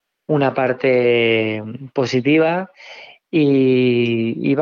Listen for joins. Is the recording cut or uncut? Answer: uncut